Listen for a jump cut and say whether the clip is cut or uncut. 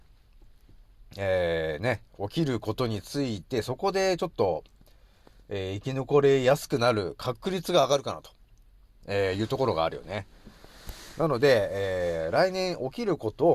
uncut